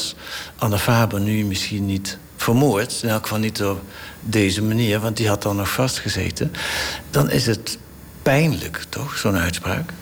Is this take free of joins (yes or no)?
yes